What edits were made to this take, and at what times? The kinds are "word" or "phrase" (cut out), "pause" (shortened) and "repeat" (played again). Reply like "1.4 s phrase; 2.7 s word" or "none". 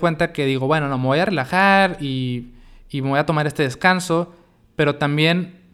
none